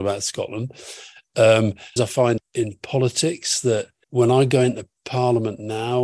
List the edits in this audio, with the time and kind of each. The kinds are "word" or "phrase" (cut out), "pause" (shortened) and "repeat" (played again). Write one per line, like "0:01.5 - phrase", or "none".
0:02.0 - word
0:02.4 - word
0:04.0 - word